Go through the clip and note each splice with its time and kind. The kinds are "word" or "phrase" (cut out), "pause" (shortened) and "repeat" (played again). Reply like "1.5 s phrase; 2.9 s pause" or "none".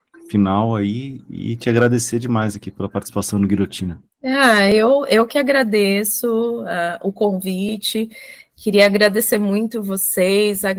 4.1 s pause